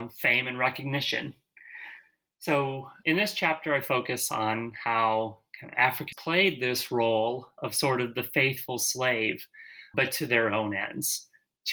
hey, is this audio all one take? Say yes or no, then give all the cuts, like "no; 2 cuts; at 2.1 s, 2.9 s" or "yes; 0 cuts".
no; 3 cuts; at 3.0 s, 6.1 s, 9.9 s